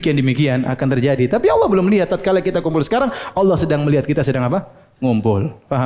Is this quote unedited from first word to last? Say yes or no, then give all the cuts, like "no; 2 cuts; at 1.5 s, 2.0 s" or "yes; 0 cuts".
yes; 0 cuts